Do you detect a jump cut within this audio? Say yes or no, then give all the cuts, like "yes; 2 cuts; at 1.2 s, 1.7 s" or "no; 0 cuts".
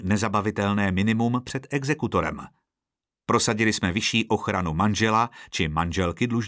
no; 0 cuts